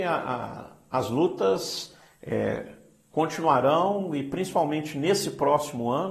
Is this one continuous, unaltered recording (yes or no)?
yes